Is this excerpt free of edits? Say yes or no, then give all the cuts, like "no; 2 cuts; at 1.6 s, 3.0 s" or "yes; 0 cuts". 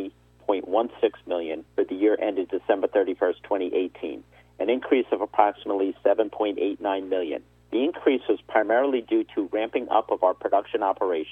no; 2 cuts; at 1.7 s, 7.6 s